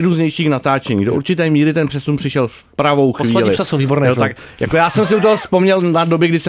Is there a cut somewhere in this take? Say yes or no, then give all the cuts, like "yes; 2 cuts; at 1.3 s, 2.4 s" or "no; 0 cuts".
no; 0 cuts